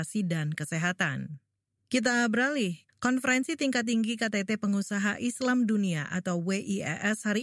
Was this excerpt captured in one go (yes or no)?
yes